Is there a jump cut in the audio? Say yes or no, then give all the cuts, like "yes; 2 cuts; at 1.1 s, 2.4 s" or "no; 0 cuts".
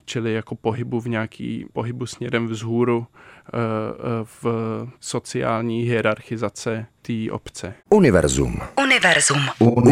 yes; 4 cuts; at 1.7 s, 4.9 s, 7.0 s, 7.8 s